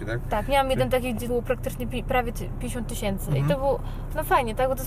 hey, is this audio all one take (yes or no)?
no